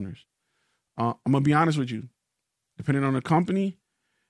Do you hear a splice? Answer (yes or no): no